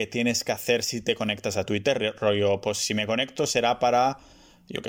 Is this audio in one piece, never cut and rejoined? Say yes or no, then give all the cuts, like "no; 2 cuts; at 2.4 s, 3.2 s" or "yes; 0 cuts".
yes; 0 cuts